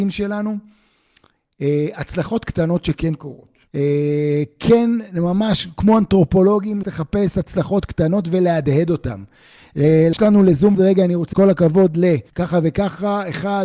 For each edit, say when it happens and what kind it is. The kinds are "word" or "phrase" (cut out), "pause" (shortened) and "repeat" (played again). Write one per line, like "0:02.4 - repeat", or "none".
0:03.7 - pause
0:06.8 - word
0:10.1 - phrase
0:10.7 - word
0:11.3 - word
0:12.3 - pause